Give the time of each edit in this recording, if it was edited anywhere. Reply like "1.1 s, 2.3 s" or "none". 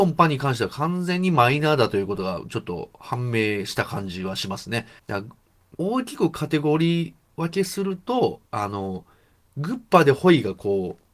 5.0 s, 5.7 s, 8.5 s